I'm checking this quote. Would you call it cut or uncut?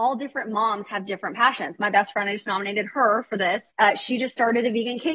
cut